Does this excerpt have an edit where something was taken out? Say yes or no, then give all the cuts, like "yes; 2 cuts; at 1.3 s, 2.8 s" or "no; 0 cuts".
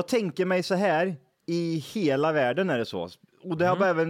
no; 0 cuts